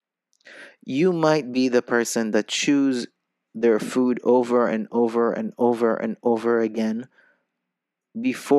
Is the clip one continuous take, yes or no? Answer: yes